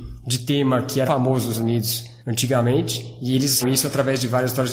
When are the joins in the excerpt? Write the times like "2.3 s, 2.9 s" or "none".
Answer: 1.1 s, 1.5 s, 2.2 s, 3.6 s